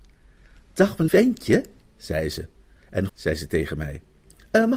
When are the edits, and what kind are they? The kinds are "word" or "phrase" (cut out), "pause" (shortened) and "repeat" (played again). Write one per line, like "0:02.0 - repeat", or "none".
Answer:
0:01.1 - word
0:03.1 - word